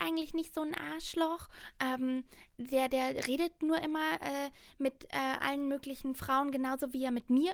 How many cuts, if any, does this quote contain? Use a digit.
0